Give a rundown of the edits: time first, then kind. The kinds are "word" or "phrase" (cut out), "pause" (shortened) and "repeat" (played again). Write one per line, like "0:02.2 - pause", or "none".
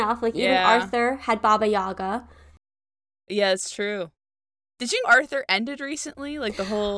0:05.0 - word